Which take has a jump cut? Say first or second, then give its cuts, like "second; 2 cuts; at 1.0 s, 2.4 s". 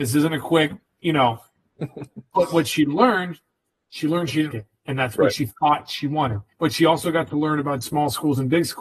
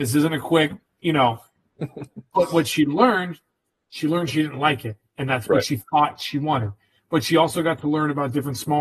first; 3 cuts; at 4.5 s, 6.5 s, 7.8 s